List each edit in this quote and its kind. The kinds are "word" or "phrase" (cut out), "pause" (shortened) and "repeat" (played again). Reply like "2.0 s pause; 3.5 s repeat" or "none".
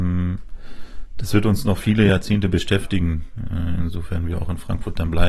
none